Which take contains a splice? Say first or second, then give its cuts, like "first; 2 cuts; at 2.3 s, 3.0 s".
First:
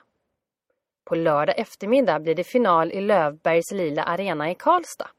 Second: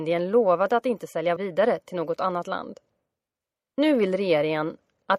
second; 1 cut; at 1.4 s